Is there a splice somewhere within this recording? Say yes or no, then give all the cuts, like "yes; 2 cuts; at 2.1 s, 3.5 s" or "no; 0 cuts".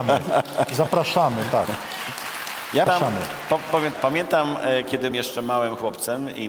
yes; 3 cuts; at 2.9 s, 3.9 s, 5.1 s